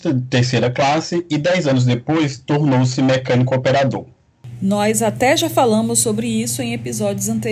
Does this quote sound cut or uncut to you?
uncut